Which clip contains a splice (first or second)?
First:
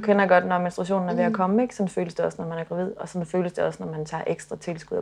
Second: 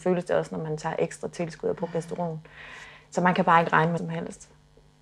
second